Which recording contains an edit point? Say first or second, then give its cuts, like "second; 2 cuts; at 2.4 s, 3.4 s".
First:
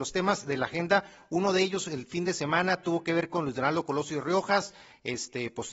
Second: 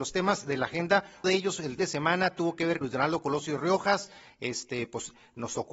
second; 3 cuts; at 1.2 s, 1.8 s, 2.8 s